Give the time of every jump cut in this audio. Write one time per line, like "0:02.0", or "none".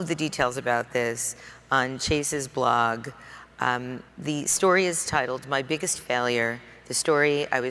0:04.1